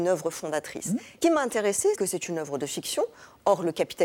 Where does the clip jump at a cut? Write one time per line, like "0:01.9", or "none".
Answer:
0:01.2
0:01.9